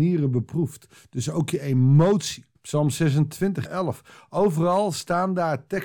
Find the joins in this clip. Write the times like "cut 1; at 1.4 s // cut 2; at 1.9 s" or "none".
cut 1; at 2.6 s // cut 2; at 3.7 s